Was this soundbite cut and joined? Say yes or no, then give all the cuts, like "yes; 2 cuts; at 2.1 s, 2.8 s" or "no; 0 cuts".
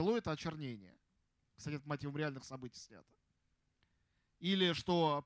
no; 0 cuts